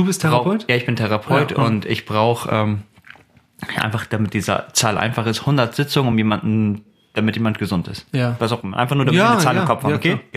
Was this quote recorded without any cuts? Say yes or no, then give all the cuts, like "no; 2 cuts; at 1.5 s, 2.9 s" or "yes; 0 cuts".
yes; 0 cuts